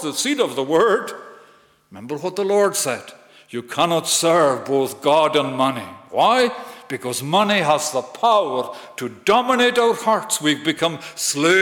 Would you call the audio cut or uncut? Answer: uncut